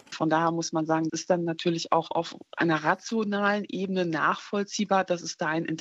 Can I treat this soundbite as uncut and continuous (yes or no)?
no